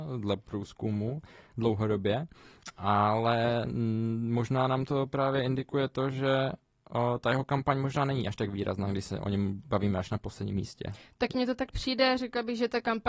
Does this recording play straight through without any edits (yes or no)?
yes